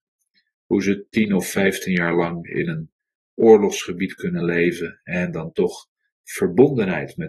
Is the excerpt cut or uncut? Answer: uncut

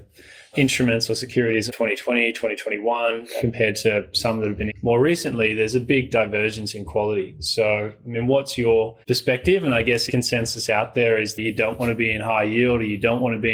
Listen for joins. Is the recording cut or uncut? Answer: cut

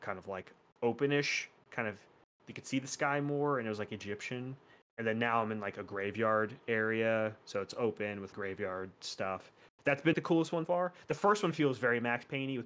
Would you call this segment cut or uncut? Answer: cut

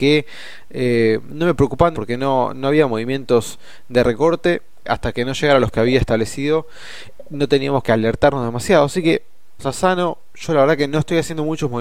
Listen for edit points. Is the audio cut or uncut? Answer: cut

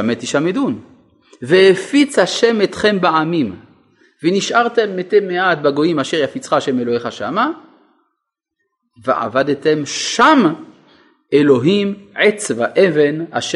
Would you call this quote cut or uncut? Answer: uncut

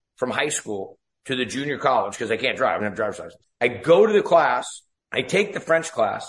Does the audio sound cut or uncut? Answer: cut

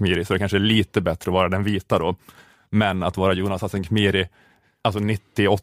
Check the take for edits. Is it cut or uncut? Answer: uncut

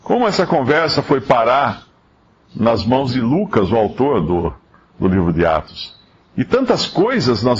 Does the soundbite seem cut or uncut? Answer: uncut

